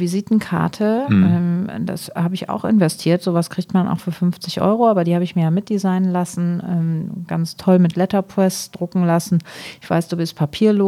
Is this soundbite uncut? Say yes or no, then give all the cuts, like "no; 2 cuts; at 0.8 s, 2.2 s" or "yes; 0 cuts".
yes; 0 cuts